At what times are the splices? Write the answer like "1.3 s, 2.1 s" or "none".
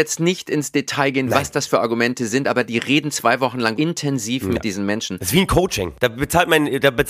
3.7 s